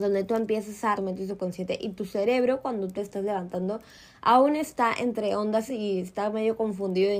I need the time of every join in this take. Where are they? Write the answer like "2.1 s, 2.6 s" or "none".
1.0 s, 3.0 s, 5.7 s